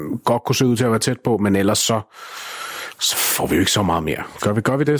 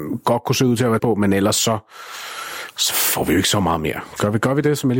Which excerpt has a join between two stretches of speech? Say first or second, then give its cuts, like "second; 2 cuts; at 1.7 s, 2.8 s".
second; 1 cut; at 1.0 s